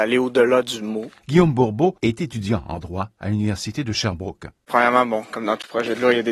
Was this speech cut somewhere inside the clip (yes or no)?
yes